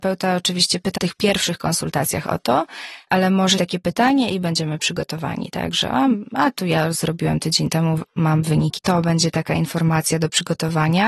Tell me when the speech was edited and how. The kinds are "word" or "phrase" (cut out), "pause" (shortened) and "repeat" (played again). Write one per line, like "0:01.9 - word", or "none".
0:01.0 - word
0:03.6 - phrase
0:08.8 - phrase